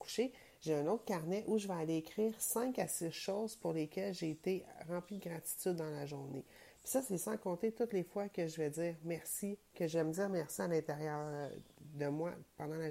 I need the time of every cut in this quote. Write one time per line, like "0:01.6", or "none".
none